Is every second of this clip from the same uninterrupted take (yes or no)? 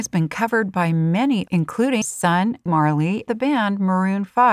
no